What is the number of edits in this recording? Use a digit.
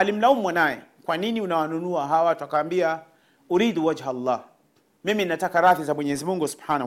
0